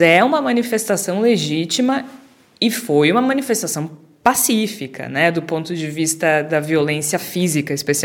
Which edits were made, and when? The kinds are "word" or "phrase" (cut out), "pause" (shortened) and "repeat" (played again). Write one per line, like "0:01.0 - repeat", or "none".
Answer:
none

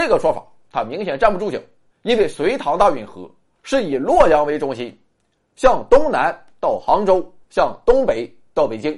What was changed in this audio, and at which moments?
0:01.9 - pause
0:07.4 - pause

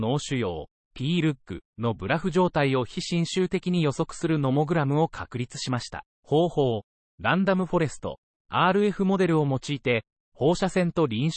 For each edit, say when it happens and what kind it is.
0:01.6 - pause
0:06.1 - pause

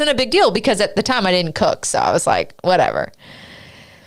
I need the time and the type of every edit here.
none

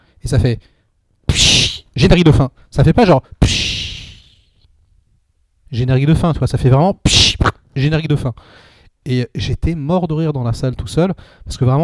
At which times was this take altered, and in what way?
none

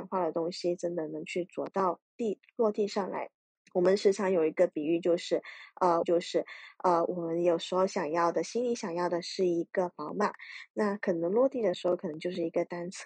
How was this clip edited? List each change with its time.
0:03.5 - pause
0:06.0 - repeat

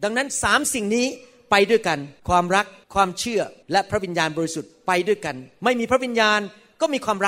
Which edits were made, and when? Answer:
0:02.2 - pause
0:02.8 - pause
0:03.6 - pause

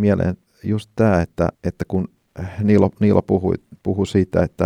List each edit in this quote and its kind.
0:01.5 - pause

